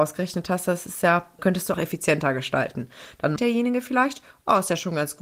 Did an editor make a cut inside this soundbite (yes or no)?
yes